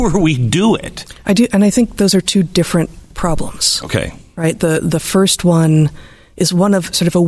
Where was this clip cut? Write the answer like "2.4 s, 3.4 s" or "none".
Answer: none